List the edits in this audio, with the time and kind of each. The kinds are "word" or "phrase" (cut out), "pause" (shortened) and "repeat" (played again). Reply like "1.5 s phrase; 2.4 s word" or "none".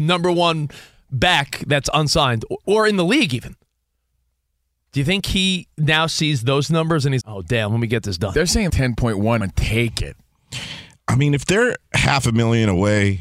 7.2 s word; 8.7 s word; 9.4 s word